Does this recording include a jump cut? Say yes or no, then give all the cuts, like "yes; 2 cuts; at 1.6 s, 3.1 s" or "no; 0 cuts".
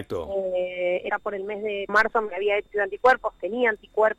yes; 3 cuts; at 1.1 s, 1.9 s, 2.7 s